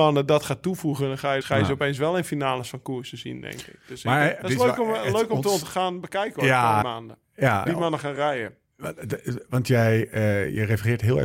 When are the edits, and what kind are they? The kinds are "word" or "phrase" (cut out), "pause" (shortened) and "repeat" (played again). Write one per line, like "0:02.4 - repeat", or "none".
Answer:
0:01.4 - word
0:04.4 - word
0:06.8 - word
0:07.7 - word